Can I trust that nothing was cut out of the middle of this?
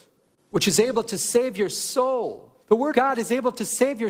no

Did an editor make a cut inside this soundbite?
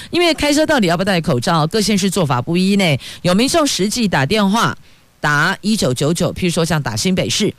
no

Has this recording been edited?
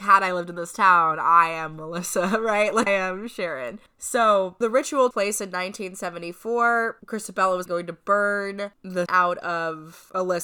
yes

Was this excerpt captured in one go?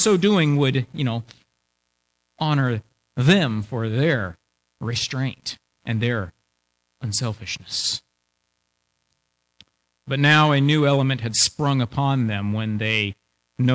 yes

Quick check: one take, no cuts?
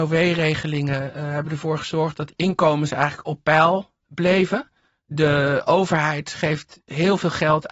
yes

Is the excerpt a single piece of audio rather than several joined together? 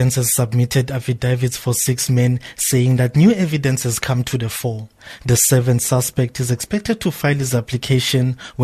yes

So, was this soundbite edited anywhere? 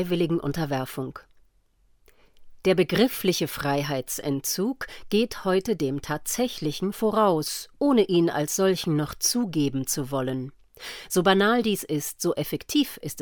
no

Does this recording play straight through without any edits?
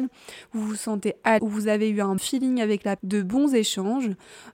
no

